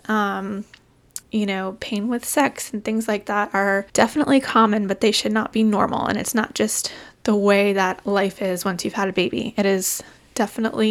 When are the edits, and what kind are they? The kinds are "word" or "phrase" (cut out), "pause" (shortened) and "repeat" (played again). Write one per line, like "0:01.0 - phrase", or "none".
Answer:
0:01.2 - pause
0:03.9 - pause